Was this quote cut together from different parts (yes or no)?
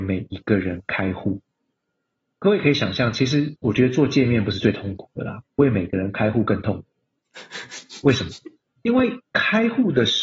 yes